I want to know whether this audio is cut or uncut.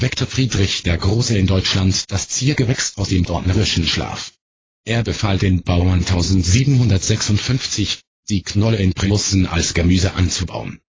uncut